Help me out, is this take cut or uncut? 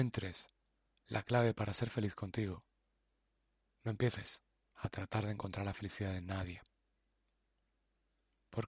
uncut